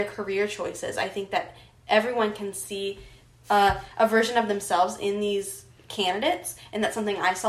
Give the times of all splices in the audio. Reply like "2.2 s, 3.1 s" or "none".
none